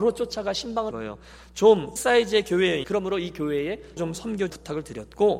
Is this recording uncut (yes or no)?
no